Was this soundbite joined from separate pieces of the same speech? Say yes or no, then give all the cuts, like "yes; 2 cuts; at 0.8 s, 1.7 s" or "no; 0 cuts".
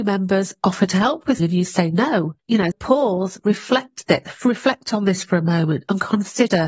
yes; 3 cuts; at 1.4 s, 2.4 s, 2.7 s